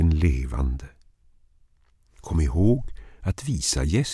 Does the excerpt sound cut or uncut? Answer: uncut